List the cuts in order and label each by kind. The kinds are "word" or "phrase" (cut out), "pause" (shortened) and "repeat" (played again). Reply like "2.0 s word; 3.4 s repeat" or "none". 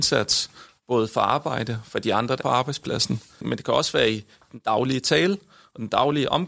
2.4 s word

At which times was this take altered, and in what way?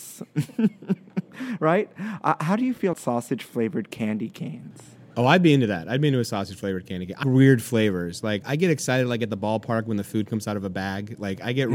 2.9 s word; 7.2 s word; 8.4 s word

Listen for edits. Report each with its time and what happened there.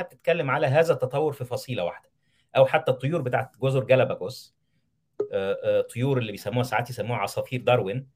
none

